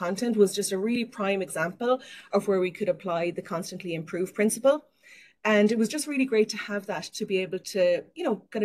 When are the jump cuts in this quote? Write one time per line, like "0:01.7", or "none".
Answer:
none